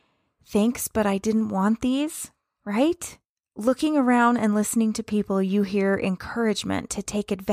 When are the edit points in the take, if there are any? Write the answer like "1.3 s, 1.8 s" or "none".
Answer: none